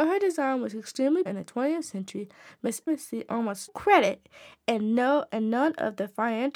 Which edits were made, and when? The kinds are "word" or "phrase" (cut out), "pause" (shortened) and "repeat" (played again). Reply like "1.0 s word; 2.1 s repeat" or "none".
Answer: 1.3 s word; 2.9 s word; 3.7 s word